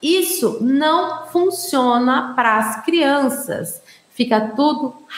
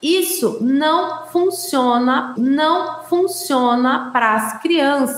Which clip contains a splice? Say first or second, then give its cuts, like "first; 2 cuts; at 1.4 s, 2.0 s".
second; 1 cut; at 2.4 s